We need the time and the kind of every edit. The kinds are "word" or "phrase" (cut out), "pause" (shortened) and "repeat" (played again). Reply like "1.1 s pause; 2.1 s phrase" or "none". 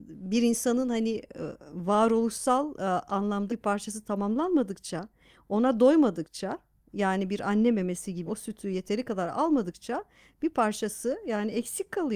3.5 s word; 8.3 s word